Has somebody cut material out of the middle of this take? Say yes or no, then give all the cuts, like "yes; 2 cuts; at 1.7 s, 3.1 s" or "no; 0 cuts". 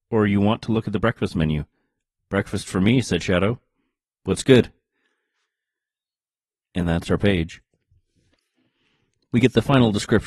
no; 0 cuts